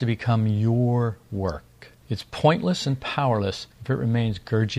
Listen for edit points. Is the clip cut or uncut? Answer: uncut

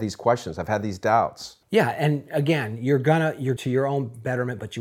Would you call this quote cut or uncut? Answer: cut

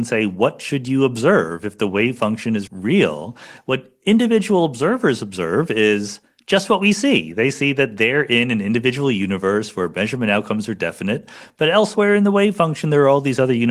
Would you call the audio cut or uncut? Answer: cut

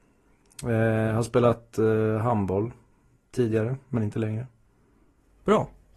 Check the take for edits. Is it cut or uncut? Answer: uncut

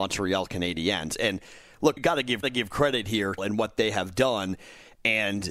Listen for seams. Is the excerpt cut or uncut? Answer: cut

